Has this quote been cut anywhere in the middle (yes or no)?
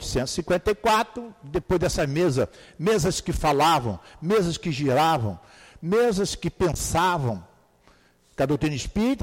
no